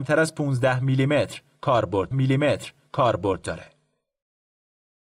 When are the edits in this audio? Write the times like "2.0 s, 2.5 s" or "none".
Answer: 2.1 s

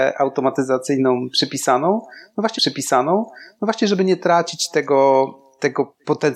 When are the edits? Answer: 2.6 s

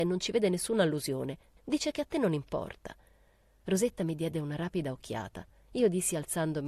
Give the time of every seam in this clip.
none

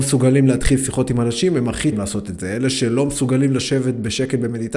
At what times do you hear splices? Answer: 1.9 s

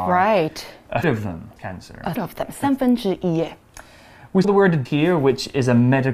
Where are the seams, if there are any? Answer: 1.0 s, 1.6 s, 2.1 s, 4.4 s, 4.8 s

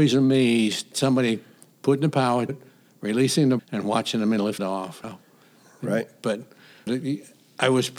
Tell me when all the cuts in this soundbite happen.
0.9 s, 1.7 s, 2.5 s, 3.6 s, 4.6 s, 5.0 s, 6.9 s

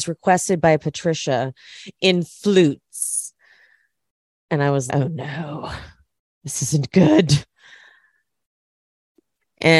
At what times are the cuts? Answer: 4.9 s

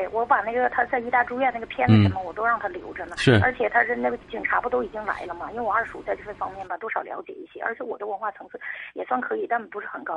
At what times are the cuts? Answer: 4.2 s

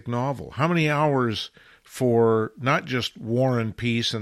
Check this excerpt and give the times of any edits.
none

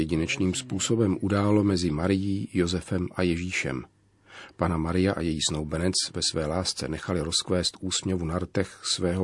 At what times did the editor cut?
none

